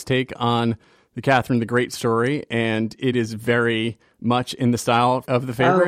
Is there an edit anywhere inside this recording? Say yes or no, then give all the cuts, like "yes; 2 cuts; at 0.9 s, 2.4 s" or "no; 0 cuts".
no; 0 cuts